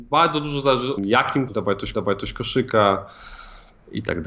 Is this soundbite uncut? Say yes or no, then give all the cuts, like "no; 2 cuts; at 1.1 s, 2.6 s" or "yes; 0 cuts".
no; 3 cuts; at 1.0 s, 1.5 s, 1.9 s